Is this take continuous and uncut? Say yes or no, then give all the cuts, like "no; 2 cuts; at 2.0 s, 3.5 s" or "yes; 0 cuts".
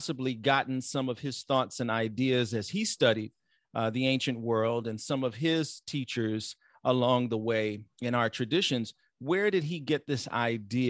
yes; 0 cuts